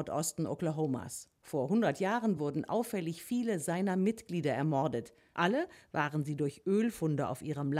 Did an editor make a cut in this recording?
no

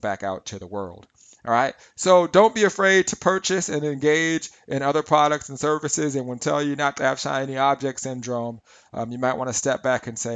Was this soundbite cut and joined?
yes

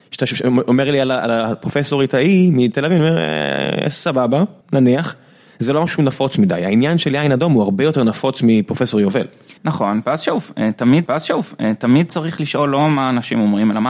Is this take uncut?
no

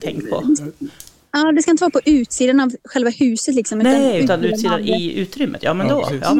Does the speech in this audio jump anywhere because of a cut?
no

